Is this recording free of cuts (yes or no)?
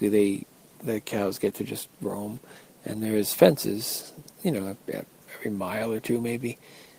no